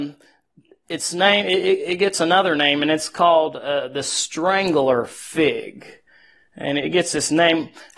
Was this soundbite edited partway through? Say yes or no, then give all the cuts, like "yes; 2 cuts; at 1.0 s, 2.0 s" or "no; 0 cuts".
no; 0 cuts